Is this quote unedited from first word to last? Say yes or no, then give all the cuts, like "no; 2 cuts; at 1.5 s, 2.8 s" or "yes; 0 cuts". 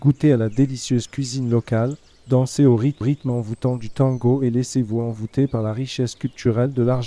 no; 1 cut; at 3.0 s